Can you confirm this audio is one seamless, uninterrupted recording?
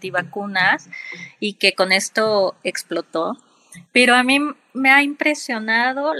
no; 1 cut; at 3.9 s

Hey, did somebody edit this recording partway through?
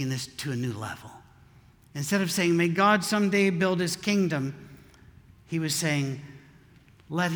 no; 0 cuts

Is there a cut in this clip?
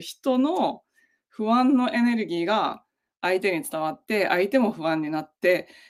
no; 0 cuts

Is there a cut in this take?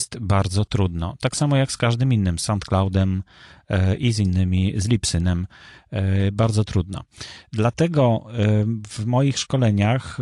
no; 0 cuts

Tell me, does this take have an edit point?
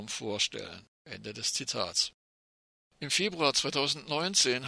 yes; 2 cuts; at 0.9 s, 2.7 s

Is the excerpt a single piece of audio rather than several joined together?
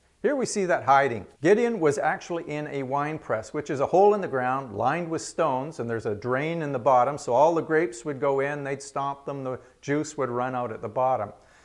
no; 1 cut; at 1.3 s

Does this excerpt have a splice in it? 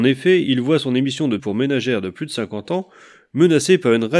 yes; 1 cut; at 1.4 s

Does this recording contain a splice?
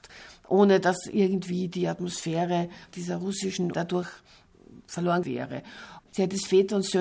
yes; 2 cuts; at 3.7 s, 5.2 s

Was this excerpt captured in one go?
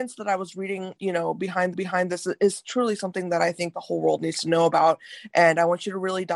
no; 2 cuts; at 1.0 s, 1.7 s

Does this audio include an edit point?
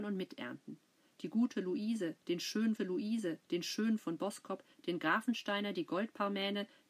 yes; 1 cut; at 2.8 s

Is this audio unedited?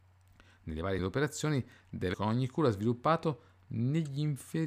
no; 2 cuts; at 1.0 s, 2.1 s

